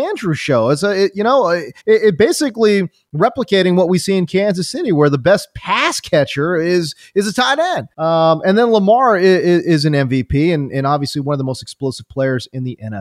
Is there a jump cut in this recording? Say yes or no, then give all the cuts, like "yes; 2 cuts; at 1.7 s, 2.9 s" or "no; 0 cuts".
yes; 2 cuts; at 1.8 s, 7.9 s